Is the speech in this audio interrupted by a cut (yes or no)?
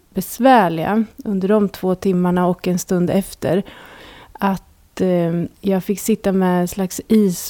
yes